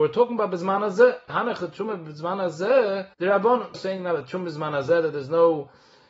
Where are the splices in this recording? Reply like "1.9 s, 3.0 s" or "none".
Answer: 1.3 s, 3.1 s, 3.7 s

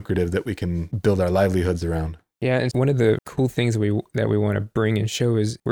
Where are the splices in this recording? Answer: 2.7 s, 3.2 s

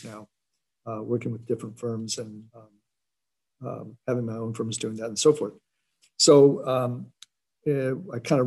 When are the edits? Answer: 2.5 s

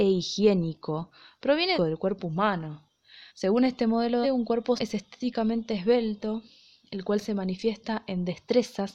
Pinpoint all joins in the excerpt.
1.7 s, 3.3 s, 4.2 s, 4.8 s

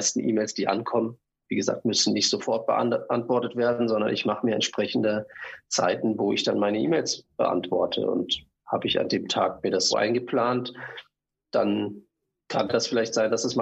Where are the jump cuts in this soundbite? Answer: 9.9 s

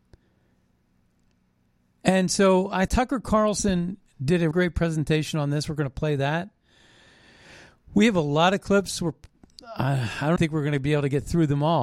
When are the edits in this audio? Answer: 2.9 s, 4.5 s, 10.4 s

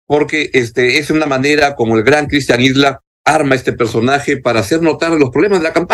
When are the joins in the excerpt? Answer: none

